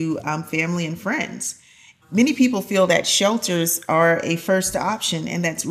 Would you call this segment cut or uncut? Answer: uncut